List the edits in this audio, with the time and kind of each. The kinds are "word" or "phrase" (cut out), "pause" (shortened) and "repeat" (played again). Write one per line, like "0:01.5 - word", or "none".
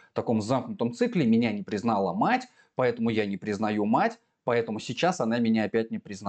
none